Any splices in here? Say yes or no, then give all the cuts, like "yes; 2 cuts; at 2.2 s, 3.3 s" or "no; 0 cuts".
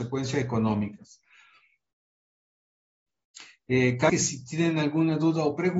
yes; 1 cut; at 4.1 s